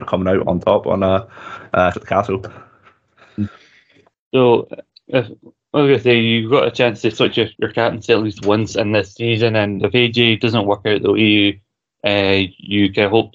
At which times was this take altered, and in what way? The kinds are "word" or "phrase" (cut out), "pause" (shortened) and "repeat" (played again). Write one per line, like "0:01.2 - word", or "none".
0:01.9 - word
0:07.5 - word